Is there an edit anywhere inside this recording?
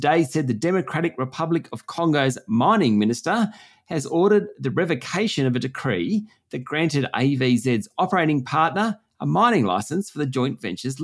no; 0 cuts

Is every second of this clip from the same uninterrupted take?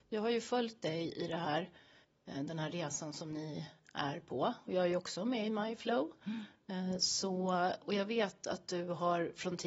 yes; 0 cuts

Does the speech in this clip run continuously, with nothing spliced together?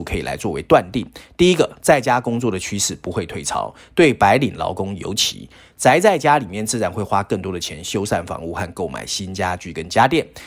yes; 0 cuts

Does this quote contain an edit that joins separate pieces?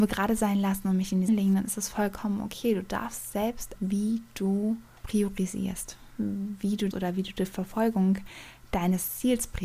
yes; 4 cuts; at 1.3 s, 3.8 s, 5.0 s, 6.9 s

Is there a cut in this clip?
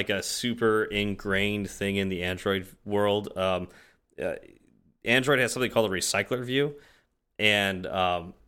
no; 0 cuts

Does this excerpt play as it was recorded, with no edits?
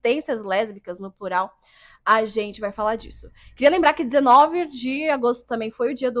yes; 0 cuts

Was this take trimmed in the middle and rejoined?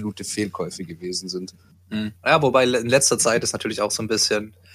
yes; 1 cut; at 2.2 s

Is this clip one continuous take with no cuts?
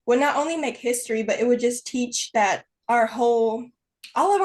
yes; 0 cuts

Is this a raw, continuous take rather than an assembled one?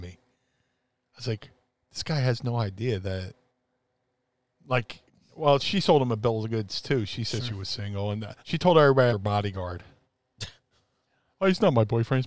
no; 3 cuts; at 5.1 s, 8.4 s, 9.1 s

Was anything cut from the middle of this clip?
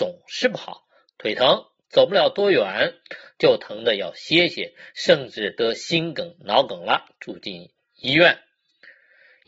no; 0 cuts

